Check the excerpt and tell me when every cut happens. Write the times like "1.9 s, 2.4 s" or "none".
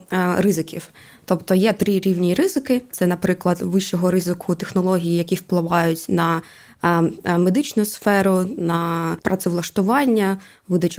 none